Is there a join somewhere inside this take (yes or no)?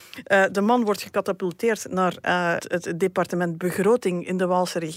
yes